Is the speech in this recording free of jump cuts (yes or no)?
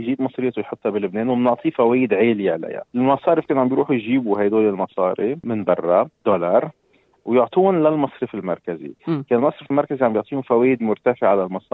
no